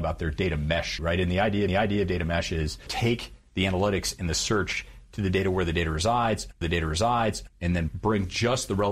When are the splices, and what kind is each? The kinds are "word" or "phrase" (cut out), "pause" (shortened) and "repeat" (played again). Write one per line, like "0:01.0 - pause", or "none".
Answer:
0:01.0 - word
0:01.7 - repeat
0:02.9 - phrase
0:06.6 - repeat